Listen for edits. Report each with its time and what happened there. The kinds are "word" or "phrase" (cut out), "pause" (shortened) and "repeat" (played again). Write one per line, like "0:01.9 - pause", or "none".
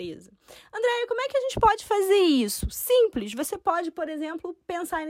none